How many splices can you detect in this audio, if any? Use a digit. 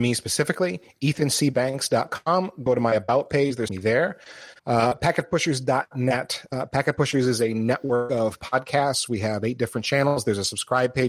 2